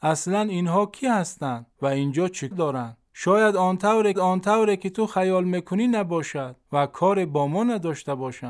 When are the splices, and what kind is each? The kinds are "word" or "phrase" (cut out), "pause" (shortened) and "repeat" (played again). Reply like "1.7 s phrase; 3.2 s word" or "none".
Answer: 1.7 s pause; 2.5 s word; 3.1 s pause; 4.1 s repeat; 6.6 s pause